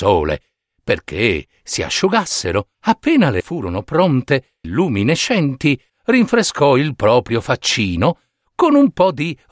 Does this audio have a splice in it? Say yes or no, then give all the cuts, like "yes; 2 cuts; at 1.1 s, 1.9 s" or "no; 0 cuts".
yes; 4 cuts; at 2.7 s, 3.4 s, 4.6 s, 5.9 s